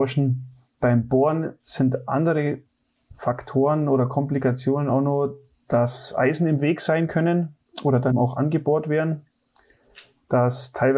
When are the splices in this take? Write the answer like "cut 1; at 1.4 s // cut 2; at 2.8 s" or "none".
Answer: cut 1; at 8.1 s